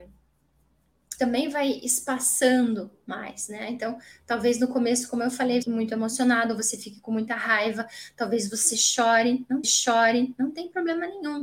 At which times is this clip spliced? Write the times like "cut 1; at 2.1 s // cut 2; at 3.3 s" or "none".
cut 1; at 1.2 s // cut 2; at 5.6 s // cut 3; at 9.6 s